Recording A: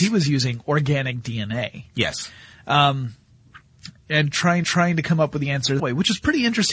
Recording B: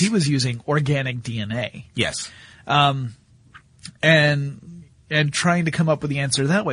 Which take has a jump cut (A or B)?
A